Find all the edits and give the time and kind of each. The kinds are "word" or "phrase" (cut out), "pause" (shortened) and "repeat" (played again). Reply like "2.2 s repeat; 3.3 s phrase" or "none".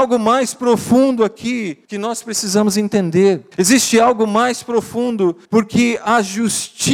1.8 s pause; 3.5 s pause; 5.4 s pause

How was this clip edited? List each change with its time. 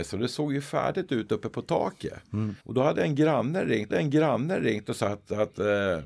2.6 s pause; 3.9 s repeat

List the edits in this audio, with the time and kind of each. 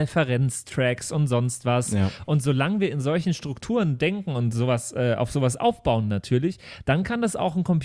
none

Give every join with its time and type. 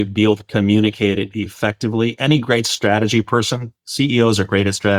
none

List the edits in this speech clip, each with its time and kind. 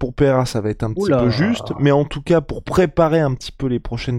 none

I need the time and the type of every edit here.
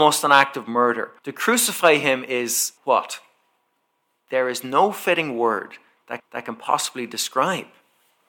1.2 s pause; 2.8 s pause; 6.2 s repeat

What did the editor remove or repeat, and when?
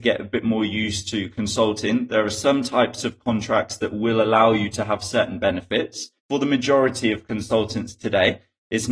6.2 s pause

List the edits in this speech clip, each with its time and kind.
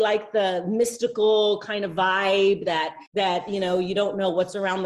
3.1 s pause

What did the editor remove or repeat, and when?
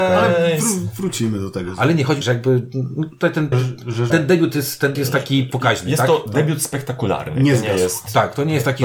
2.2 s phrase; 3.5 s word; 4.1 s word; 4.9 s word

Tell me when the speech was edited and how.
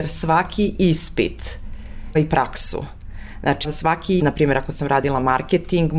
2.1 s word; 3.6 s word; 4.2 s word

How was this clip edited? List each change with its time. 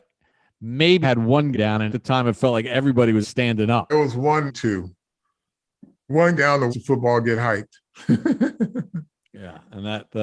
1.0 s word; 1.5 s word; 1.9 s word; 3.2 s word; 3.9 s word; 4.5 s word; 6.4 s word; 6.7 s word

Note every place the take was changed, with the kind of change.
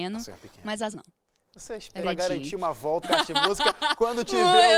0.9 s word; 2.0 s word; 3.0 s word

